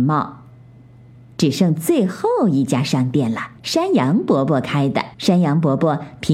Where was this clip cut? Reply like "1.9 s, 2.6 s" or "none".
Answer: 3.6 s, 5.1 s